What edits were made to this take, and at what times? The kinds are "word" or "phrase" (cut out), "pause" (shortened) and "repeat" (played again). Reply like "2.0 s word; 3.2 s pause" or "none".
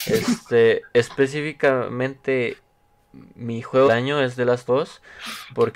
3.9 s word; 4.7 s word

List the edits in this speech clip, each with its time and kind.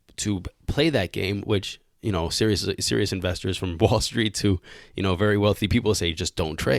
none

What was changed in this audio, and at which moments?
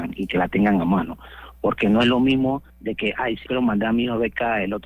2.7 s pause; 3.5 s word

